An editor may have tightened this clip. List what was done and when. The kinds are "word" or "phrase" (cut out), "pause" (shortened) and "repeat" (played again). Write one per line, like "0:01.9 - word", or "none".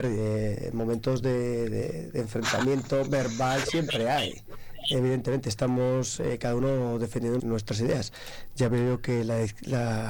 0:07.4 - word